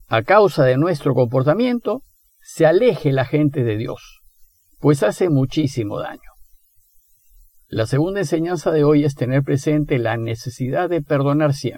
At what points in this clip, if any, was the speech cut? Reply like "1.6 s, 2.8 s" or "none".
none